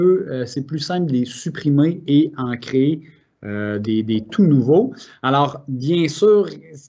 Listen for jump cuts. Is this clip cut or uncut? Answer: uncut